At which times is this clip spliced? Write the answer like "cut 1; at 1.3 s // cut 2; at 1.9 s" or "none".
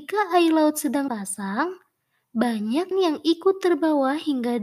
cut 1; at 1.1 s // cut 2; at 2.9 s